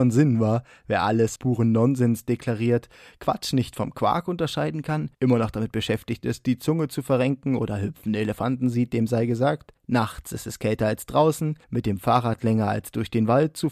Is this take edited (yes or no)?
yes